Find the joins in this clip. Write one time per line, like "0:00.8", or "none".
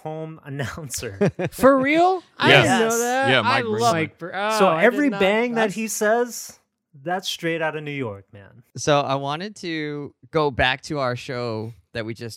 0:03.9

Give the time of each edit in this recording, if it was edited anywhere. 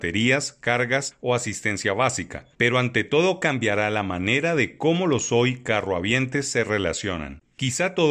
none

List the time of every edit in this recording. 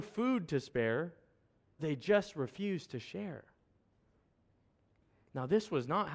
0:01.8

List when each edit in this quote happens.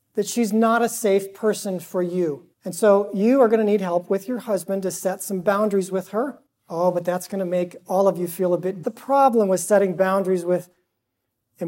0:02.5
0:06.5
0:08.8

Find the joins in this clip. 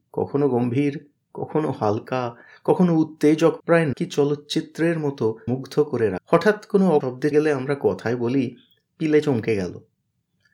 0:03.6
0:03.9
0:05.5
0:06.2
0:07.0
0:07.3

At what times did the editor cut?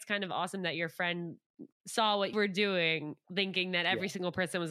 0:01.7
0:02.3
0:03.2

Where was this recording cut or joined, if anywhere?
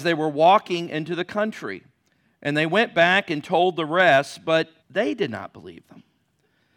0:04.8

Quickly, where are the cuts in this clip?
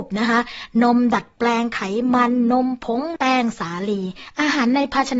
0:03.2

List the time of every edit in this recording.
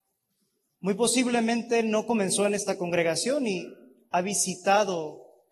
none

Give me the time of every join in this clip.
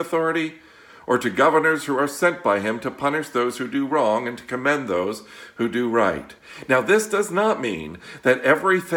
none

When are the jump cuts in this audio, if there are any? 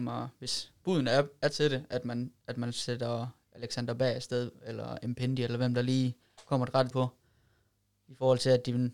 0:06.9

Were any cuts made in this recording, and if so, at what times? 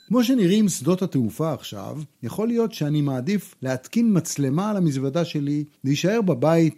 0:02.1
0:03.6
0:05.7

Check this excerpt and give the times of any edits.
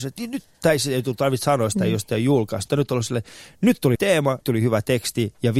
0:02.7
0:04.0
0:04.4

